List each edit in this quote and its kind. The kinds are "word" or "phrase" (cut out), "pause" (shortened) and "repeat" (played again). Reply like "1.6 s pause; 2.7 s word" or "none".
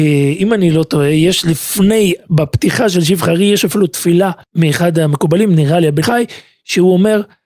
4.4 s pause; 6.0 s word